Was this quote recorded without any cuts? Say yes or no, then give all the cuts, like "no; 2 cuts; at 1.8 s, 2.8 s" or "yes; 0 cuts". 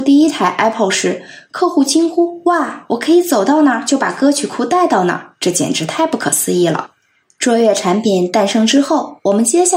yes; 0 cuts